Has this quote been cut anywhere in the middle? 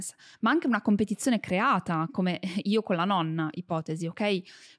no; 0 cuts

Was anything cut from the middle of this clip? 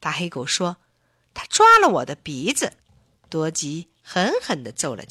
yes; 1 cut; at 2.8 s

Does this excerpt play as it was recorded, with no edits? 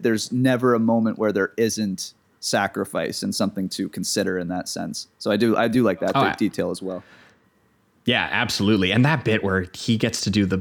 yes; 0 cuts

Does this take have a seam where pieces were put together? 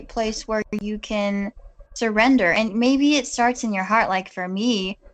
yes; 1 cut; at 1.9 s

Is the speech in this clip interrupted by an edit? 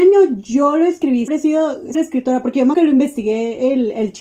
yes; 3 cuts; at 1.3 s, 1.9 s, 2.7 s

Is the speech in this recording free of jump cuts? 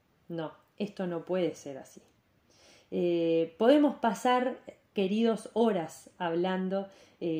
yes; 0 cuts

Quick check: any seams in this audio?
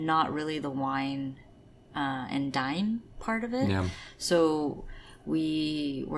no; 0 cuts

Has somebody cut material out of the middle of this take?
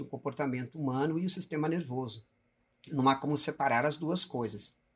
no; 0 cuts

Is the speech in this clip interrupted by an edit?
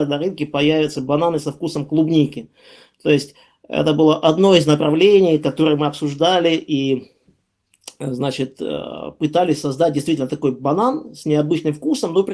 no; 0 cuts

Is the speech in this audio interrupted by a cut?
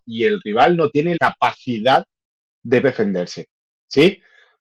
yes; 2 cuts; at 1.2 s, 2.8 s

